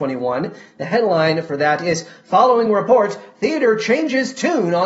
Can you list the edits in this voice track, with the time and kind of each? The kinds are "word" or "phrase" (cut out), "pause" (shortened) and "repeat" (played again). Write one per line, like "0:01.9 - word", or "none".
none